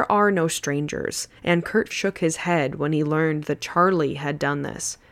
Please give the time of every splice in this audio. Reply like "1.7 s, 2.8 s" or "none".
1.4 s, 1.9 s